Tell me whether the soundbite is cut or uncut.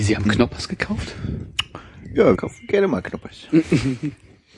cut